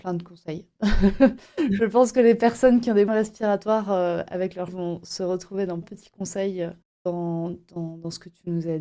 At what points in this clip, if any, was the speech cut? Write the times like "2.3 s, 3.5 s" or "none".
3.1 s, 4.7 s, 5.8 s, 6.8 s